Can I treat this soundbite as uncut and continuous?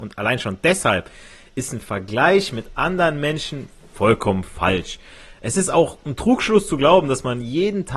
yes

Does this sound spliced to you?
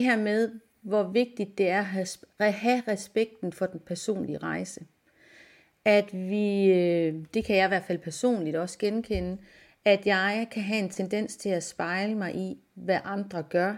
no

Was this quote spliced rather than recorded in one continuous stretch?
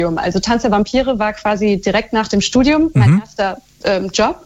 no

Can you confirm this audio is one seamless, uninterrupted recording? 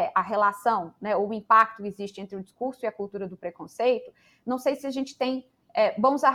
yes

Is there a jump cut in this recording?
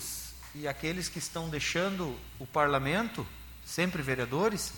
no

